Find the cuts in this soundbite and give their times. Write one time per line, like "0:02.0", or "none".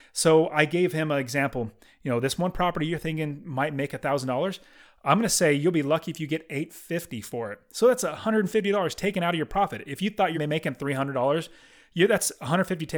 0:10.3